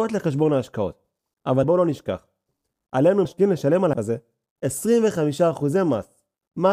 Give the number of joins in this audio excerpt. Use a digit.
3